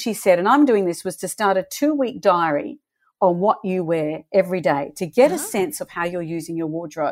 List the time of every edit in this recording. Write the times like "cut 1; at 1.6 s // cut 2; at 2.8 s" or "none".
none

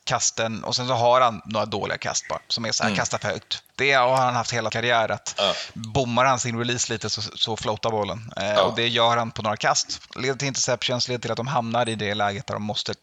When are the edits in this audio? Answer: cut 1; at 3.7 s // cut 2; at 4.7 s

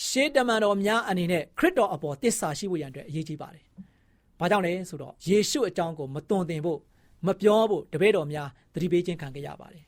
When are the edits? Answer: cut 1; at 5.2 s

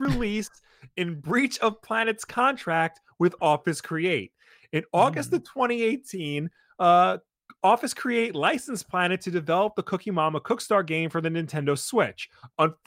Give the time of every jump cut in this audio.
none

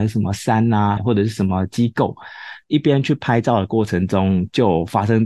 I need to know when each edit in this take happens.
cut 1; at 1.0 s

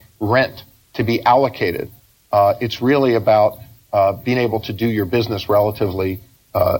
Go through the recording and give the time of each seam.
none

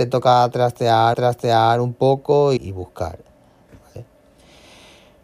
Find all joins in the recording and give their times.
cut 1; at 1.1 s // cut 2; at 2.6 s

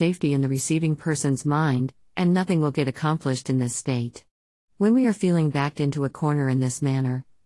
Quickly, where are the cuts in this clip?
none

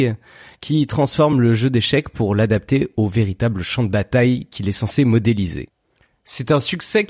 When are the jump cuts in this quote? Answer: none

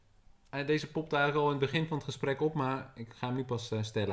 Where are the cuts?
none

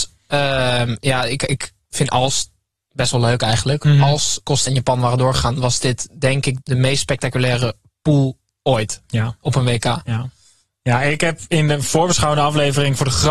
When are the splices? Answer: cut 1; at 4.7 s // cut 2; at 6.6 s

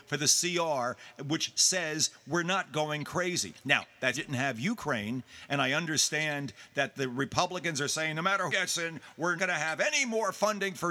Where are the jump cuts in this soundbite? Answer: cut 1; at 4.1 s // cut 2; at 8.5 s // cut 3; at 9.4 s

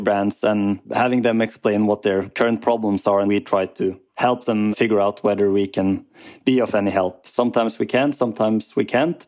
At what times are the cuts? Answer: cut 1; at 3.3 s // cut 2; at 4.1 s // cut 3; at 4.7 s

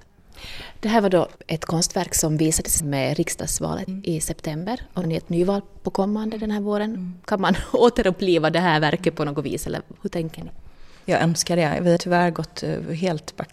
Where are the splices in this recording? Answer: cut 1; at 1.4 s // cut 2; at 2.8 s // cut 3; at 3.9 s // cut 4; at 5.0 s // cut 5; at 7.2 s // cut 6; at 12.0 s

